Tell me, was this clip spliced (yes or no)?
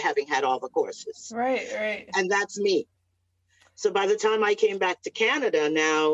no